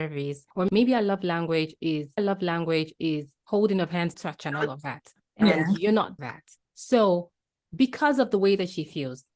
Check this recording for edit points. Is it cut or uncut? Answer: cut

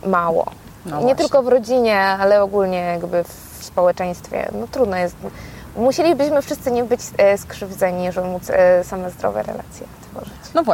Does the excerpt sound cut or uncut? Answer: cut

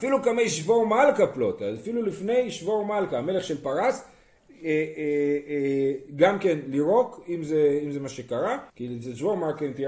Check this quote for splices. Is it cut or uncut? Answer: cut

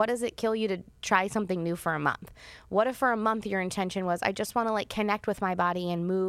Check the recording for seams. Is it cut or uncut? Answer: uncut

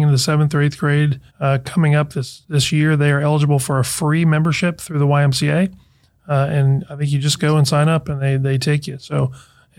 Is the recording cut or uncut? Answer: cut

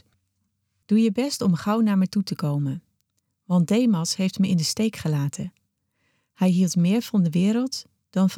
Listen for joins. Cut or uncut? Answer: uncut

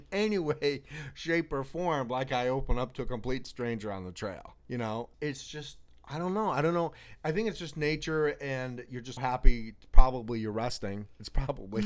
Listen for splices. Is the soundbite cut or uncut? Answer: cut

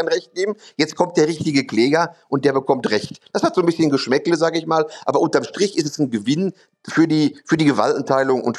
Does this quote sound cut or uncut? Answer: uncut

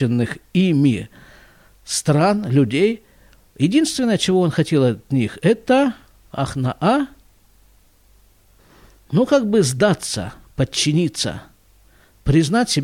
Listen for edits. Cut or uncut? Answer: uncut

